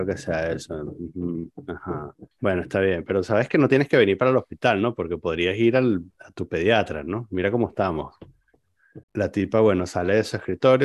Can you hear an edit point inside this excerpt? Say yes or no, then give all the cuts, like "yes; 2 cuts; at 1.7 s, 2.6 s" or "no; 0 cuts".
yes; 3 cuts; at 2.3 s, 6.1 s, 9.0 s